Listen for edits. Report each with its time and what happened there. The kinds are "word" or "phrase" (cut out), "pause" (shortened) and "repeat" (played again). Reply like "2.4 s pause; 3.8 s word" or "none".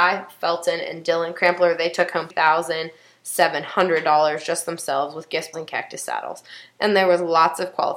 2.3 s phrase; 5.5 s word